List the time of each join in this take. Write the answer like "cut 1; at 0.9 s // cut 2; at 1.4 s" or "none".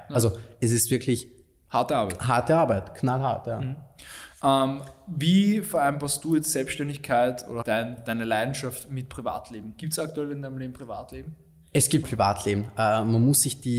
cut 1; at 7.6 s // cut 2; at 12.0 s